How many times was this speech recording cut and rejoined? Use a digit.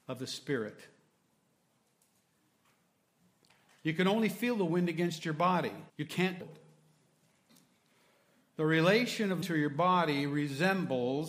3